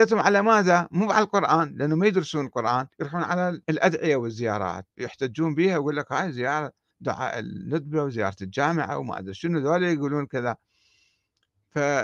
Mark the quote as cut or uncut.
cut